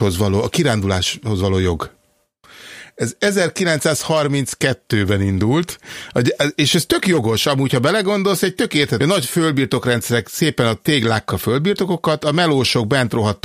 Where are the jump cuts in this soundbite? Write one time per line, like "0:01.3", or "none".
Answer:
0:09.0
0:11.3

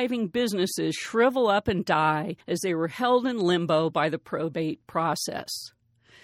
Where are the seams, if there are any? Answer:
0:02.4

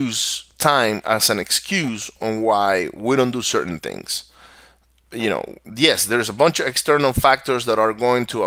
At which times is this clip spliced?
none

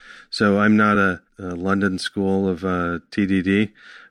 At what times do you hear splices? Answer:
none

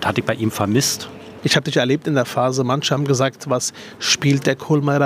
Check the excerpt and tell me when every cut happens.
none

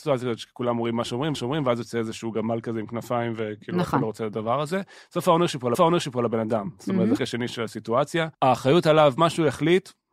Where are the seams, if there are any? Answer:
0:01.3
0:05.7
0:07.2
0:08.3

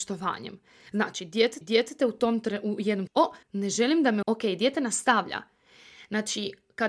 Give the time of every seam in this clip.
0:01.6
0:03.1
0:03.4
0:04.2

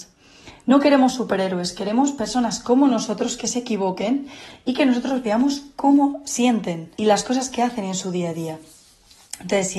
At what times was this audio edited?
0:06.9

